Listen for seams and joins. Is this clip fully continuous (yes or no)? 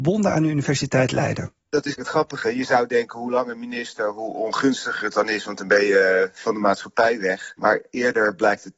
no